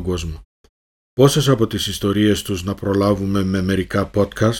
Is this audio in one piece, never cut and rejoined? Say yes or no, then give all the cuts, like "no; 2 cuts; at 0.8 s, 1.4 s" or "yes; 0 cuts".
yes; 0 cuts